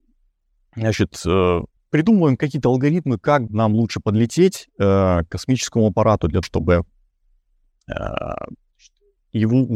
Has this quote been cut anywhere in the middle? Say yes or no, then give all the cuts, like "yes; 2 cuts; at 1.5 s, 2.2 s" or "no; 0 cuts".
yes; 3 cuts; at 1.8 s, 3.5 s, 6.4 s